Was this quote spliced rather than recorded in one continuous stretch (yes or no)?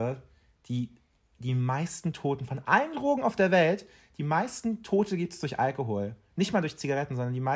no